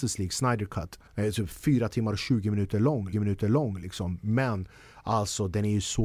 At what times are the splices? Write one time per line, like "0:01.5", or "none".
0:01.1
0:03.1